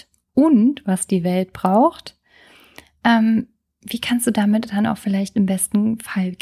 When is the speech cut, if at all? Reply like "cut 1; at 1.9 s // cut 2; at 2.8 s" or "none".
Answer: none